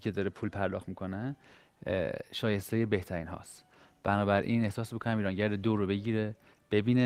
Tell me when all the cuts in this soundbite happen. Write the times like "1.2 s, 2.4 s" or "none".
none